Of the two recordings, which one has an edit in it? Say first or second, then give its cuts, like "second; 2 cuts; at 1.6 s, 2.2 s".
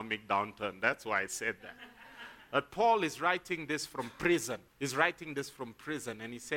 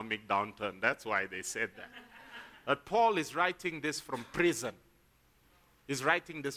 first; 2 cuts; at 1.3 s, 4.7 s